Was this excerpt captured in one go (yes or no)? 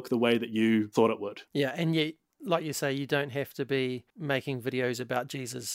no